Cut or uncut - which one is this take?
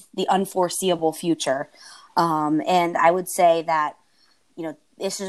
uncut